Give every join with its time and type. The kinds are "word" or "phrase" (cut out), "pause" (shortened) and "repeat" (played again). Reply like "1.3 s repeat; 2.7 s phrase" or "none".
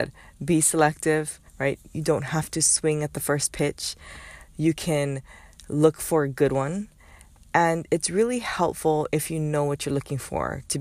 1.5 s pause